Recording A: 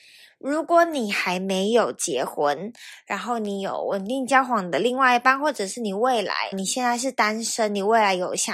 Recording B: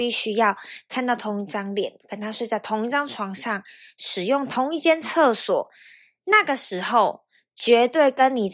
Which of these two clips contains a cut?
A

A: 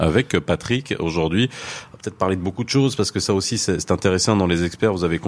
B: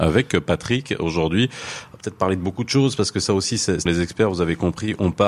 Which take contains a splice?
B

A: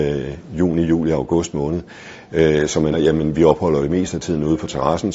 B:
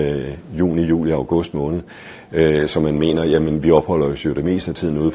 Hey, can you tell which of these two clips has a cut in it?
A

